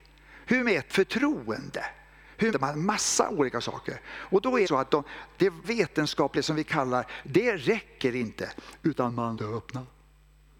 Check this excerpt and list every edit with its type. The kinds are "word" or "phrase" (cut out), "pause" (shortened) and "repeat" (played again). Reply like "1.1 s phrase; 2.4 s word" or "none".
0.9 s word; 2.5 s word; 4.7 s word; 5.6 s word; 7.2 s word; 9.4 s word